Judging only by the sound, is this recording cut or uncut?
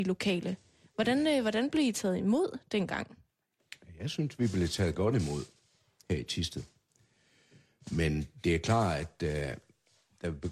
uncut